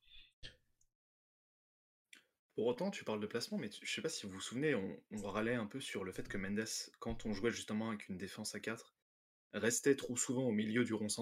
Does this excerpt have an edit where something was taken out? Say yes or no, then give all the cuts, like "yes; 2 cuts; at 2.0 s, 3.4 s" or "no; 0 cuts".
no; 0 cuts